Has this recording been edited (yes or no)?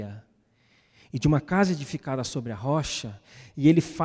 no